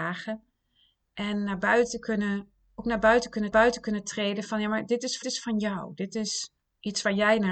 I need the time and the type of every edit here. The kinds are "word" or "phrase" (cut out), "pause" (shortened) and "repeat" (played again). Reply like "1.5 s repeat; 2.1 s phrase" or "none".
2.6 s pause; 3.5 s repeat; 5.2 s repeat; 6.6 s pause